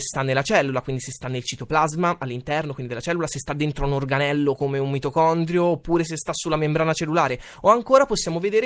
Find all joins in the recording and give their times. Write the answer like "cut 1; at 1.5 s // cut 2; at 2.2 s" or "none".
none